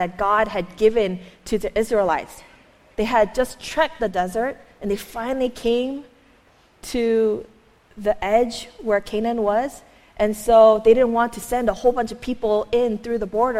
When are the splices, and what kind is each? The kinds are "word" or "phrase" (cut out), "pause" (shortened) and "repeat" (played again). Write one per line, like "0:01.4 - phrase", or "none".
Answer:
0:04.0 - word